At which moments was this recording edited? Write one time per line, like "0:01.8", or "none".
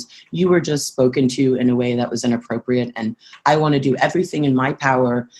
none